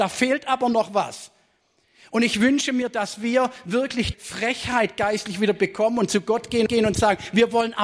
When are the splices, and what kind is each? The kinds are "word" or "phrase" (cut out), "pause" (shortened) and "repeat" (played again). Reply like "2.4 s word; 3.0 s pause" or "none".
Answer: 4.1 s word; 6.7 s repeat